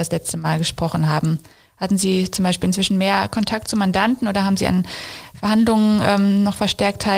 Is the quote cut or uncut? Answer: uncut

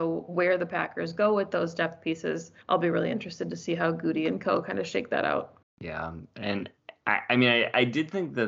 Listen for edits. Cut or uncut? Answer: cut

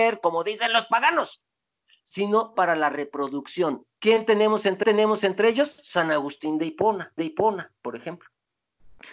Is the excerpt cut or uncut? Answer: cut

